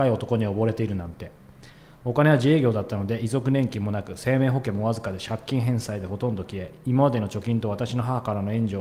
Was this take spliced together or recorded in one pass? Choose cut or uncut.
uncut